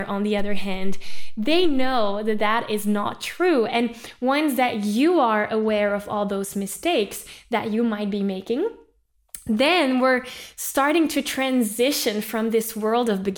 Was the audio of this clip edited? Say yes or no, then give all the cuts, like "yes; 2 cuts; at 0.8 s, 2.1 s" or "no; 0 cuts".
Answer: no; 0 cuts